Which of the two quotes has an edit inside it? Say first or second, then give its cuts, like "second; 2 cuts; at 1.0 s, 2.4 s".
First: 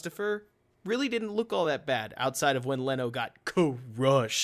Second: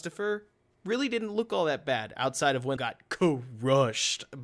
second; 1 cut; at 2.8 s